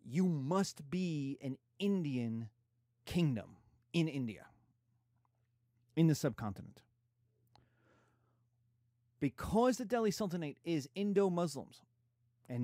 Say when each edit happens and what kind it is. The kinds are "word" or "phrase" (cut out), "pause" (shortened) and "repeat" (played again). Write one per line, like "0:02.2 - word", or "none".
none